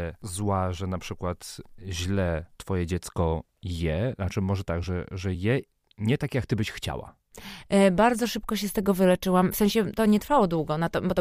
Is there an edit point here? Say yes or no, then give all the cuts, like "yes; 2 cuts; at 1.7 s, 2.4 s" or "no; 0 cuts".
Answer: no; 0 cuts